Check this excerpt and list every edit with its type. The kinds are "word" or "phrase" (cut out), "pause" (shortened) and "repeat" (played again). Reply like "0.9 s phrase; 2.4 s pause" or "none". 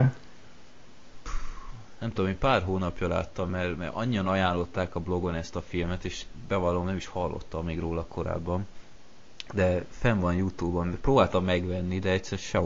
none